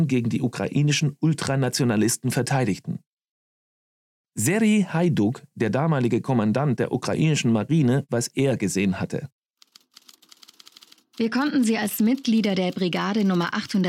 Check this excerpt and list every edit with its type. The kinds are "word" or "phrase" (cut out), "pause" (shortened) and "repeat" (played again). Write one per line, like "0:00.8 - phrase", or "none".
0:08.1 - word